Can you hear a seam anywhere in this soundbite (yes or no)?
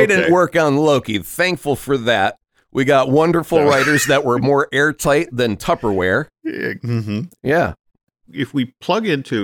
no